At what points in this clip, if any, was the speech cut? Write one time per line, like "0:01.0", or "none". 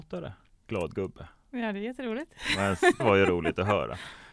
0:03.0